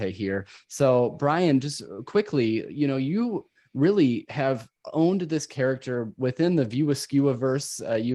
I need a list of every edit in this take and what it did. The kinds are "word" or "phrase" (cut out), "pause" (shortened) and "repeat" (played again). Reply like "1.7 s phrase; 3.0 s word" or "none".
none